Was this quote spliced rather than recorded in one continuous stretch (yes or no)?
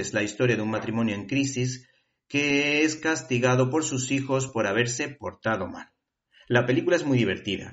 no